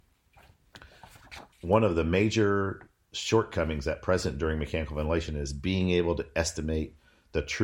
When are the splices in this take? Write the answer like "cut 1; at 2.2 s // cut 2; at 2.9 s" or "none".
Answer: cut 1; at 1.5 s